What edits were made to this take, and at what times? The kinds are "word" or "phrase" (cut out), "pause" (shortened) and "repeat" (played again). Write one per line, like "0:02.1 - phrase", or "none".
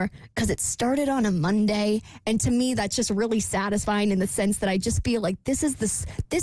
none

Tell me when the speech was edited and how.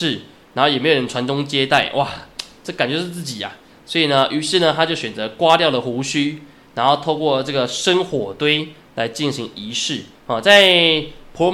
0:10.2 - pause

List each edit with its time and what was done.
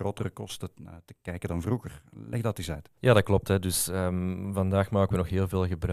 none

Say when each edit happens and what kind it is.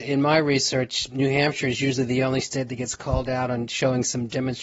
none

